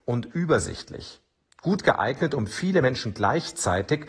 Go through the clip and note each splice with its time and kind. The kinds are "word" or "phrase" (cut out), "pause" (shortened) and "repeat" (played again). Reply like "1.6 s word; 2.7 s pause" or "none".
none